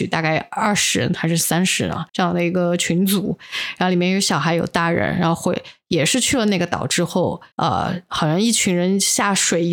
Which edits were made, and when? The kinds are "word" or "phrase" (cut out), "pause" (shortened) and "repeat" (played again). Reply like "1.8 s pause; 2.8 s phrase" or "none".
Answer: 2.1 s pause; 7.5 s pause